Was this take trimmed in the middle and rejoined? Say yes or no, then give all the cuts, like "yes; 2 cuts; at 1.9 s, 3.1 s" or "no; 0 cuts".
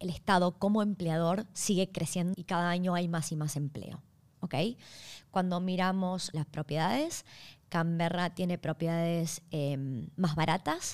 yes; 2 cuts; at 2.3 s, 6.3 s